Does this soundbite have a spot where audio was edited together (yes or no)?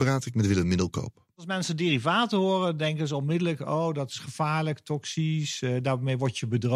no